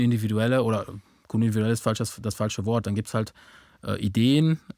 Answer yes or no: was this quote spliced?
no